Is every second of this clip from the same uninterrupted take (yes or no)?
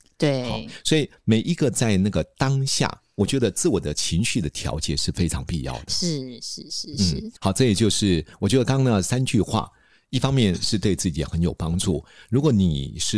no